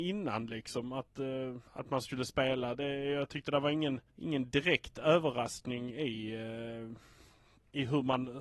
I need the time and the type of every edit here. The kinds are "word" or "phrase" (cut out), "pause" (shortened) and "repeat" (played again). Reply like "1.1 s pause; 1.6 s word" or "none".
1.7 s pause; 4.1 s pause